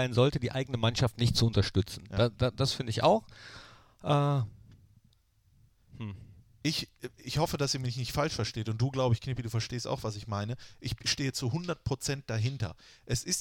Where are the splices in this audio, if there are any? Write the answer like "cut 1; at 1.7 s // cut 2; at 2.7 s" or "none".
none